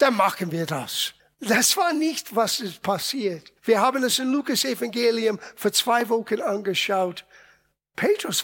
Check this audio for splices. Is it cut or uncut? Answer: cut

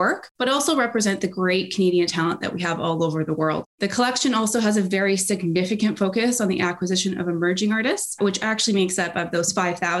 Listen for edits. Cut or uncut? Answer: uncut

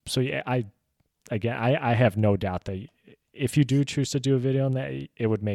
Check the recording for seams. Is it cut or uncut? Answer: uncut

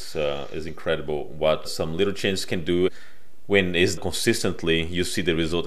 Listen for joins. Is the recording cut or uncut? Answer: cut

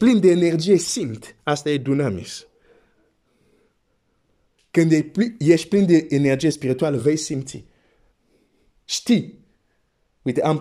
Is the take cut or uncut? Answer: uncut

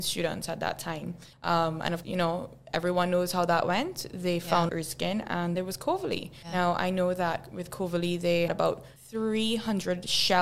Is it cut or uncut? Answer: cut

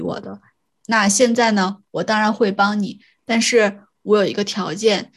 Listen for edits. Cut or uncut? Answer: uncut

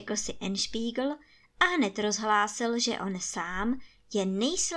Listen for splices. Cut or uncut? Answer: uncut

